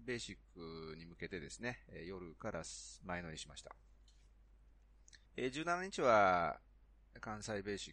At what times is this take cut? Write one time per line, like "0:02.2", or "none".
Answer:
0:05.3